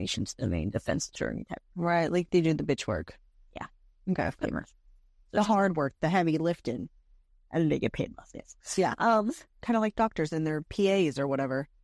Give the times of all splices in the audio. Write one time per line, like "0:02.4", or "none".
none